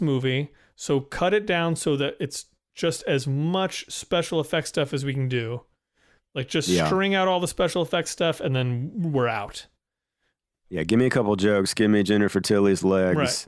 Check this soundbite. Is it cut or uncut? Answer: uncut